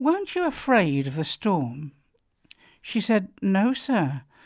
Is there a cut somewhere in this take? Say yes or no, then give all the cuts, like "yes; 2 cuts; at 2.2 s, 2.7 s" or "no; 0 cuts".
no; 0 cuts